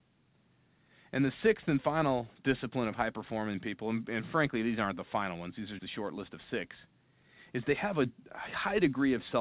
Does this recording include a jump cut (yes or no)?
yes